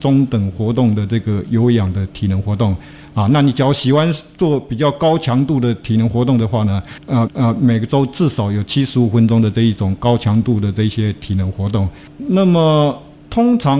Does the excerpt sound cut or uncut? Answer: cut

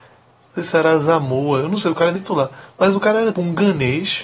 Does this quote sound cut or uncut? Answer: cut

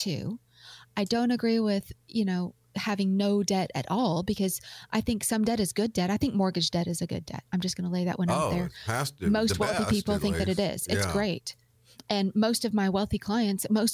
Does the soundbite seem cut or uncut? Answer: uncut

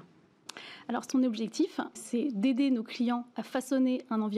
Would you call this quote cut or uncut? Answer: cut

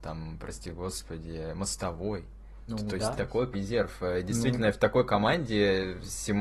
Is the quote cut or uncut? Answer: cut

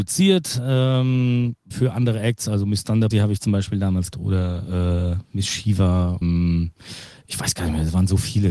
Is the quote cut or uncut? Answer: cut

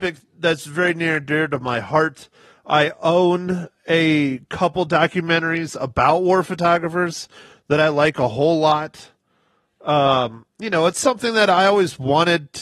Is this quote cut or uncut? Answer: uncut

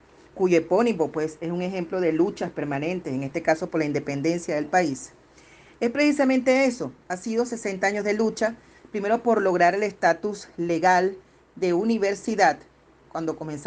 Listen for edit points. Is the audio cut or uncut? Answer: uncut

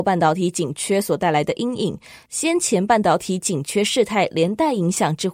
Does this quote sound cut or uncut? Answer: uncut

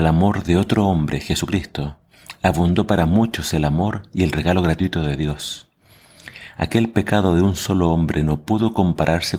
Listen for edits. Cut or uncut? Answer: uncut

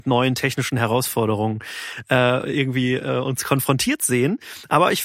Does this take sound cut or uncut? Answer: uncut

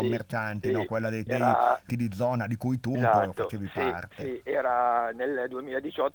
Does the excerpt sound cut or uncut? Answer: cut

